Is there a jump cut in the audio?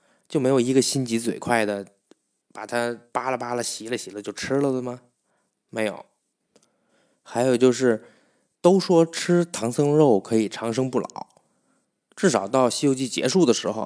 no; 0 cuts

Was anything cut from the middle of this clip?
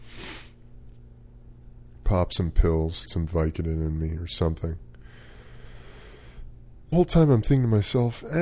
yes; 2 cuts; at 3.1 s, 6.9 s

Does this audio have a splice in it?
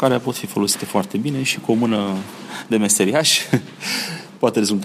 no; 0 cuts

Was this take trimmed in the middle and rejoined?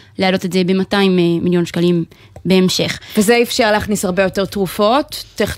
no; 0 cuts

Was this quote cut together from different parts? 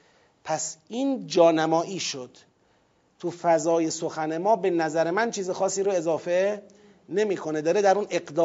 no; 0 cuts

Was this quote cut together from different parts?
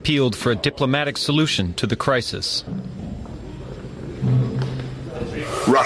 no; 0 cuts

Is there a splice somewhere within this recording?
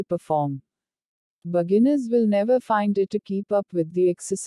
yes; 1 cut; at 3.1 s

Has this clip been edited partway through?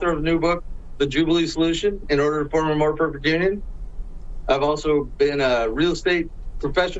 no; 0 cuts

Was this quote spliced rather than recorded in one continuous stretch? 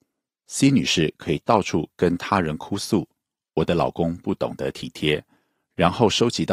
no; 0 cuts

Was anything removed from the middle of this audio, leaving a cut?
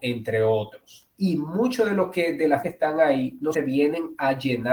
yes; 3 cuts; at 1.1 s, 2.6 s, 3.5 s

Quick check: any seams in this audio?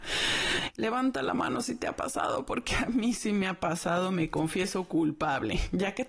no; 0 cuts

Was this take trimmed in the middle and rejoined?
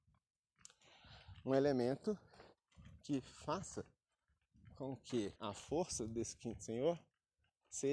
yes; 1 cut; at 5.4 s

